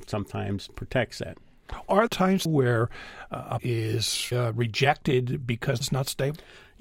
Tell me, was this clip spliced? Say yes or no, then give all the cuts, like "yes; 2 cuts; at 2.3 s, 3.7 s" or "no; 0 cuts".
yes; 5 cuts; at 2.1 s, 2.5 s, 3.6 s, 4.3 s, 5.8 s